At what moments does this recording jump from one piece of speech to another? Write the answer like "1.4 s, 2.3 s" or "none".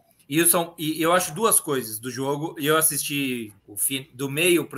3.6 s